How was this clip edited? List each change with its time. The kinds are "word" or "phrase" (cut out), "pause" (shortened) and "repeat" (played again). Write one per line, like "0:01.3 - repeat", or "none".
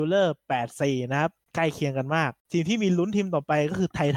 0:02.4 - pause